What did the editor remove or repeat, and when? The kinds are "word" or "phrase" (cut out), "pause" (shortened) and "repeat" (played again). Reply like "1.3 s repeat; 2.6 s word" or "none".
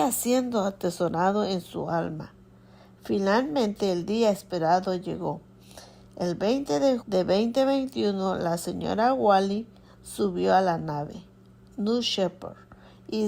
7.0 s word